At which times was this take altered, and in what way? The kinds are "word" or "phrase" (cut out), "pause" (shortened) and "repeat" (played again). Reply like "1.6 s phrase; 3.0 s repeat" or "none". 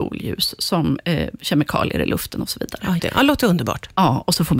3.0 s word